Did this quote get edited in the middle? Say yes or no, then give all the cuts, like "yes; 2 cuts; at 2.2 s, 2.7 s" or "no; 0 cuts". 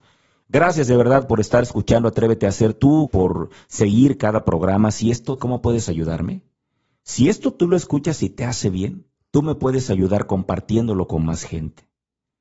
yes; 3 cuts; at 3.1 s, 5.4 s, 9.2 s